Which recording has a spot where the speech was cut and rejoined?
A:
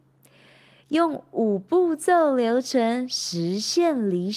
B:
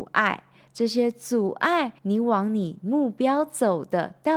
B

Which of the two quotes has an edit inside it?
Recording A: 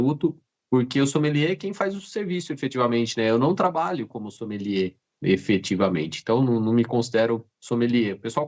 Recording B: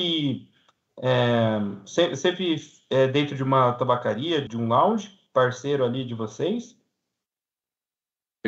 B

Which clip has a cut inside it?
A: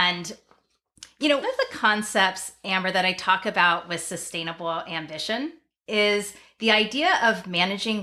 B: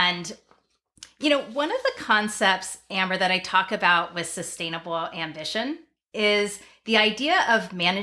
A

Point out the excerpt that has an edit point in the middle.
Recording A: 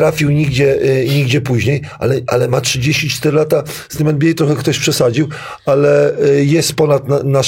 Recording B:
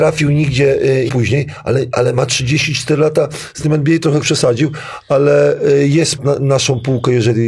B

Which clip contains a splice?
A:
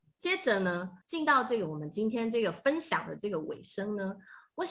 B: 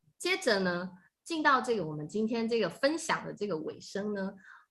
A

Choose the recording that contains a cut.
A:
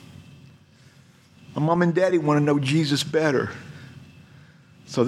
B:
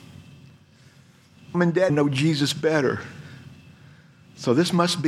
B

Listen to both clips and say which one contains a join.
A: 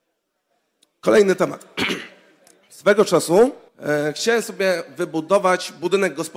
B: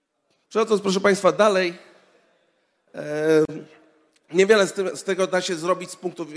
A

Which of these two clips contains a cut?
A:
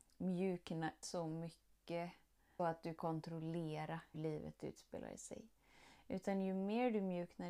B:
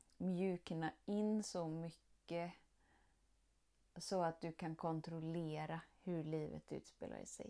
A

